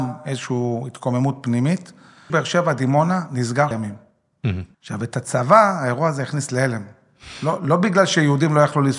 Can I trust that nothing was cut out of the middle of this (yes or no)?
no